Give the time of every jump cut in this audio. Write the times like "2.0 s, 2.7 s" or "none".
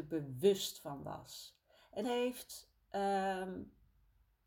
2.0 s